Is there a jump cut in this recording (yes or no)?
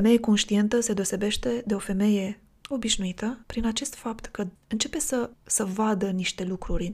yes